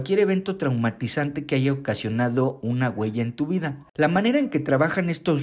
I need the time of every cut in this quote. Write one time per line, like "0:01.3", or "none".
none